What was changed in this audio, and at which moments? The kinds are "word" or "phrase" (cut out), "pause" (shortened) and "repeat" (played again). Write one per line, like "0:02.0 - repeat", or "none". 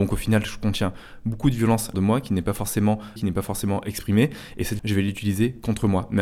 0:01.9 - phrase
0:03.2 - word
0:04.8 - word

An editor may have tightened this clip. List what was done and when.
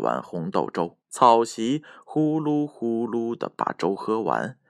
0:01.0 - pause

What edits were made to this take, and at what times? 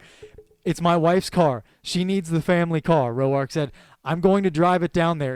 none

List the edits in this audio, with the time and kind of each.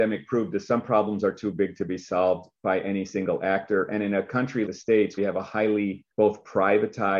0:04.7 - word
0:05.2 - phrase
0:06.1 - pause

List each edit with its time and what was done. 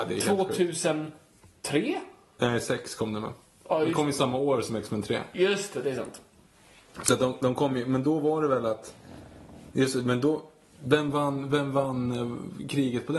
none

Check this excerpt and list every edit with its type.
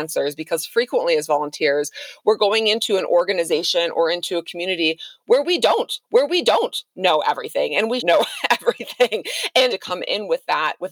0:06.0 - repeat
0:08.0 - word
0:09.7 - phrase

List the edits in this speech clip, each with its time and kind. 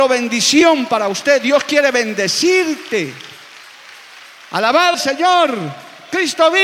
0:04.9 - phrase

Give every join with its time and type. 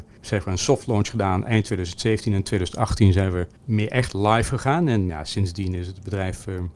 0:03.6 - pause
0:05.1 - word

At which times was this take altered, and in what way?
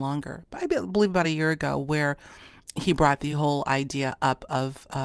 none

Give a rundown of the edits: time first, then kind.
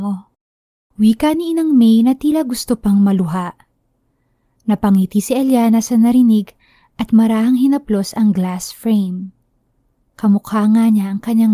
none

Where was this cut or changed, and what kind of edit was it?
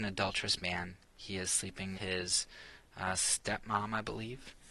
0:01.9 - word

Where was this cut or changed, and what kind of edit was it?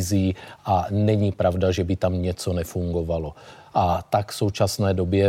none

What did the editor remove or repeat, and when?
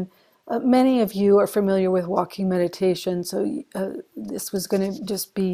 none

